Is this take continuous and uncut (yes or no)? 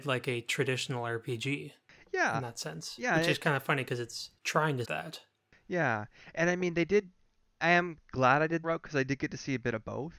no